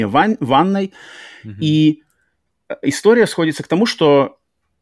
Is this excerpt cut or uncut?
uncut